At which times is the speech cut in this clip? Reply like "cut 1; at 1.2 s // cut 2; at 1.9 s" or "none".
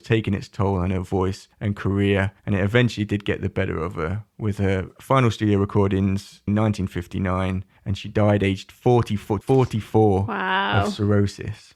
cut 1; at 1.5 s // cut 2; at 2.4 s // cut 3; at 6.5 s // cut 4; at 7.8 s // cut 5; at 9.4 s